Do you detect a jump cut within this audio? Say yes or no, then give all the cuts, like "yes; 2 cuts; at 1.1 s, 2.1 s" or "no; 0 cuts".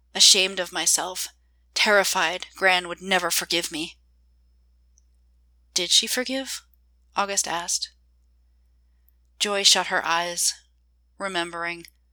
no; 0 cuts